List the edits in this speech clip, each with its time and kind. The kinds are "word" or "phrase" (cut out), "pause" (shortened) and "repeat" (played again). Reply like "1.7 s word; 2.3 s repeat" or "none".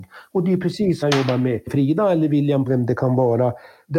1.0 s word; 2.7 s phrase

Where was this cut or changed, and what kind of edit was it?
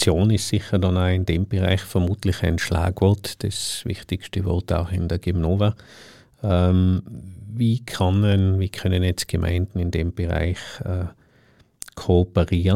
none

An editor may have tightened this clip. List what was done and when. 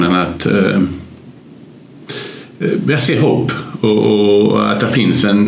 none

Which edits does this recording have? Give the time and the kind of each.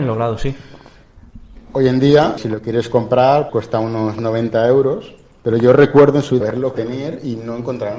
2.4 s word; 3.5 s word; 6.4 s word; 6.7 s word

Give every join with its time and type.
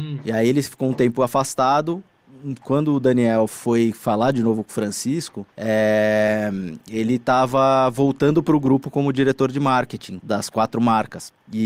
5.5 s pause; 10.2 s word

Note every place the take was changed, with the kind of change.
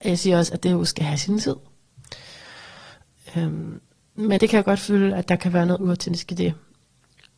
4.4 s word

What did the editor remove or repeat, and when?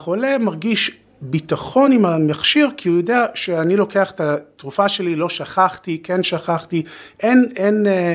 none

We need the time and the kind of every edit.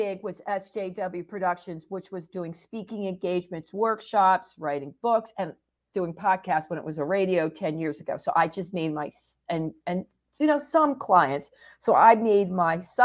none

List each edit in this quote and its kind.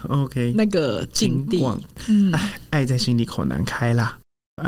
none

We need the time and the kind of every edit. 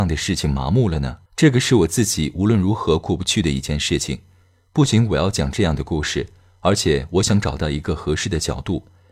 1.3 s pause

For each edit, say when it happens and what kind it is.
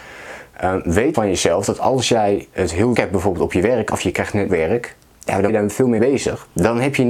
1.1 s word; 2.9 s word; 4.5 s word; 5.5 s word; 6.0 s word

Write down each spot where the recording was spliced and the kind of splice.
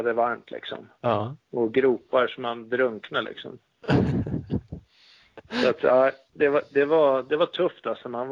0.9 s pause

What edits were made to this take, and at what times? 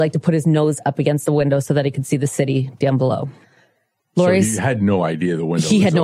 none

